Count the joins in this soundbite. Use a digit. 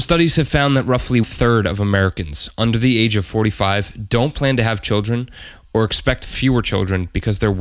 2